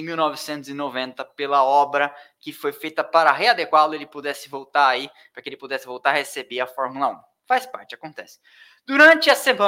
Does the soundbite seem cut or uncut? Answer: uncut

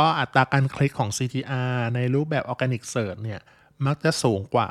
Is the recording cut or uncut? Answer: uncut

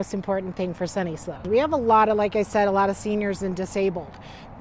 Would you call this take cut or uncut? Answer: uncut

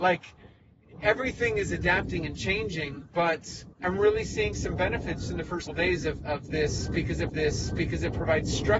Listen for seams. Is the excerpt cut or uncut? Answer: cut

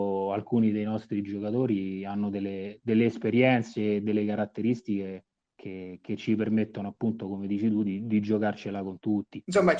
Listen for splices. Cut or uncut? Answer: uncut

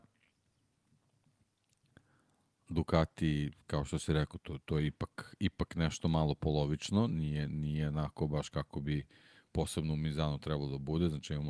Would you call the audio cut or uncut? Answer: uncut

